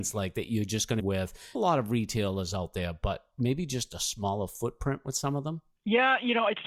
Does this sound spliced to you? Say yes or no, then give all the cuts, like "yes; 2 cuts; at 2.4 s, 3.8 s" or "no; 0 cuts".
yes; 2 cuts; at 1.0 s, 1.5 s